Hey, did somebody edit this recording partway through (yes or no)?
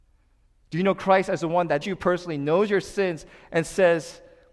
yes